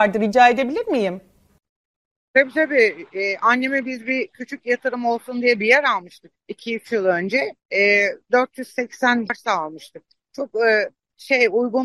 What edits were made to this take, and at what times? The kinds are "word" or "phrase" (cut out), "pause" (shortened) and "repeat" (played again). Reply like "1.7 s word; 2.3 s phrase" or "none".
6.4 s pause; 7.6 s pause; 9.3 s phrase